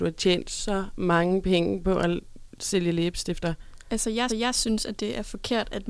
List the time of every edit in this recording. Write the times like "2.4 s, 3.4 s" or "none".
4.3 s